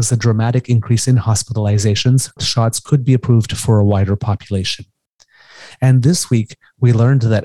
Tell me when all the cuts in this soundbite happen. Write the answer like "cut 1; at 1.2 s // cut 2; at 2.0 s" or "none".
cut 1; at 2.4 s